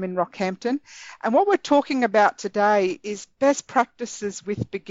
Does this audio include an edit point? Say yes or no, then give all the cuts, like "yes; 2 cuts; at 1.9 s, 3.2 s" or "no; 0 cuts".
no; 0 cuts